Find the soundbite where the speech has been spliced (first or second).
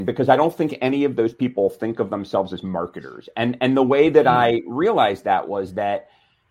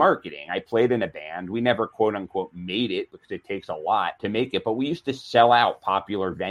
second